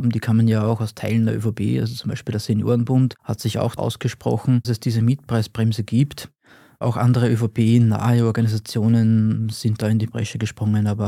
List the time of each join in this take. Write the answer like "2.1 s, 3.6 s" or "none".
3.8 s, 4.6 s